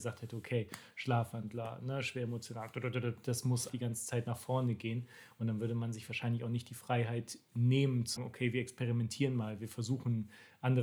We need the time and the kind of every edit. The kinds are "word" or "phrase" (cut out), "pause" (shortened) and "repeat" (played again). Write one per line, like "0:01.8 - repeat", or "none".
0:03.7 - word
0:08.2 - word